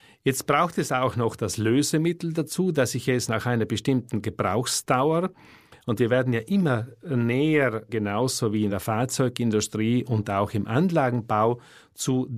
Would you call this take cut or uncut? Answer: uncut